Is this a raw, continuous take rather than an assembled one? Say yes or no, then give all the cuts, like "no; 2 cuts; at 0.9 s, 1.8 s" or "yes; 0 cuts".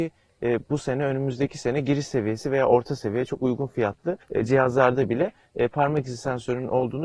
no; 1 cut; at 4.2 s